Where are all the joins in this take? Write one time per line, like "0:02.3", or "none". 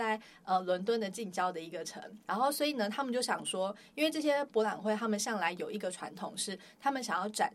0:02.2